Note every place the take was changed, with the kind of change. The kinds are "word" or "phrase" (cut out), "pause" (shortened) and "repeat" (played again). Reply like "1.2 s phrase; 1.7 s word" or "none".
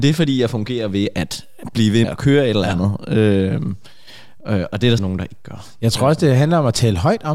2.0 s word; 5.0 s word